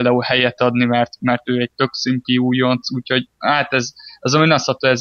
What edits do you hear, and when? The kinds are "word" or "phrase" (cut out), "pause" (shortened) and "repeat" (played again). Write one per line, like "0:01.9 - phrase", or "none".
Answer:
none